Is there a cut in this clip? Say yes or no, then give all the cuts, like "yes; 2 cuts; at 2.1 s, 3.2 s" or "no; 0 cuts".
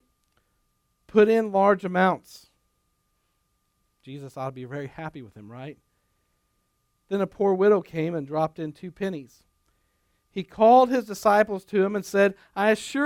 no; 0 cuts